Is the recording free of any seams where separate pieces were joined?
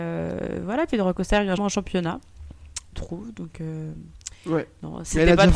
no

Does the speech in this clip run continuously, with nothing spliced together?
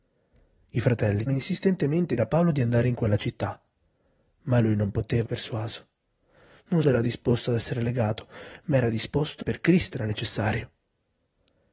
no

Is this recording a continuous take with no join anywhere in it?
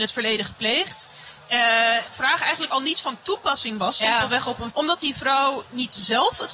no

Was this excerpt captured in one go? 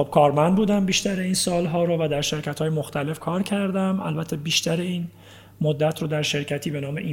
yes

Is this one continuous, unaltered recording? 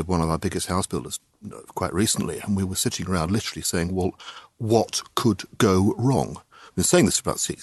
yes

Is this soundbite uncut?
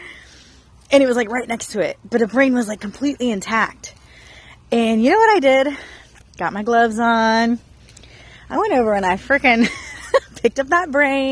yes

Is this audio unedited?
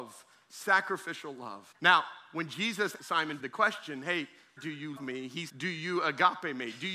no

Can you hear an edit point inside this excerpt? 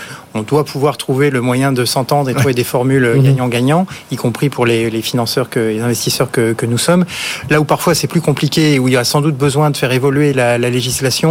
no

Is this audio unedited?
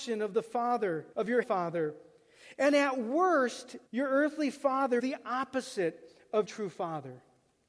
no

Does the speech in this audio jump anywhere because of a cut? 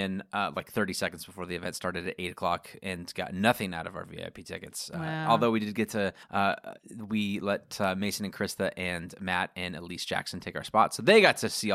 yes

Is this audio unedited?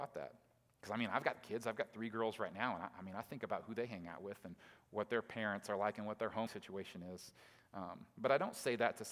no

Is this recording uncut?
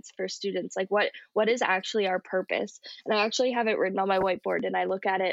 yes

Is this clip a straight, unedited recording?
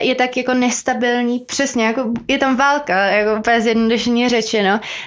yes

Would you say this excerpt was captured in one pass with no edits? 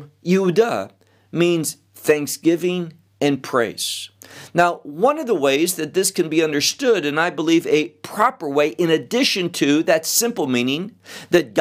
yes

